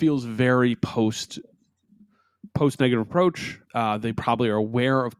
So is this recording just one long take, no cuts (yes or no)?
no